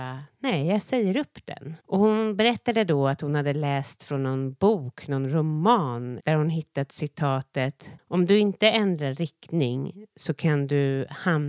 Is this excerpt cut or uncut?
cut